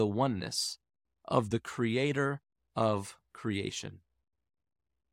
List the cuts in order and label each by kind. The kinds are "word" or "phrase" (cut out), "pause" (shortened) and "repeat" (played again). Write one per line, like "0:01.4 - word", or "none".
none